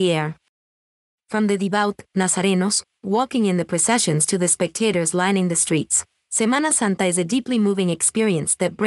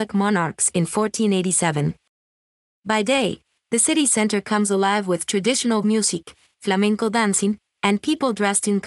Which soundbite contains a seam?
second; 1 cut; at 5.8 s

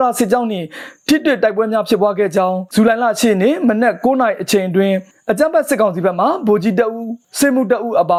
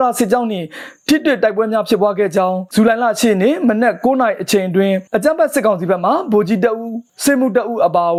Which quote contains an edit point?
second; 1 cut; at 5.1 s

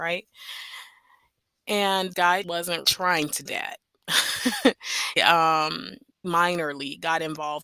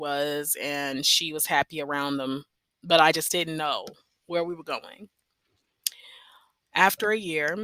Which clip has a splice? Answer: first; 6 cuts; at 2.1 s, 2.4 s, 2.8 s, 3.5 s, 5.2 s, 6.2 s

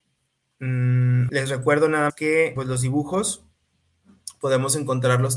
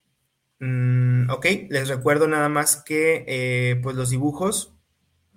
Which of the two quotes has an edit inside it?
first; 3 cuts; at 1.3 s, 2.1 s, 2.6 s

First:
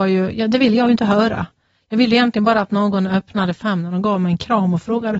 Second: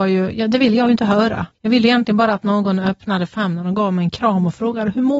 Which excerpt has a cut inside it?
second; 1 cut; at 1.5 s

